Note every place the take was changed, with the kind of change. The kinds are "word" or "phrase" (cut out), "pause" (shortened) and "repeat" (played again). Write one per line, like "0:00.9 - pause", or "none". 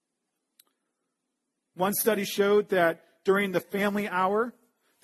none